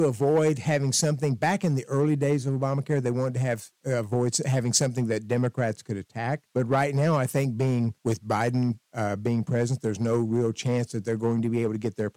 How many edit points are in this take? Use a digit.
3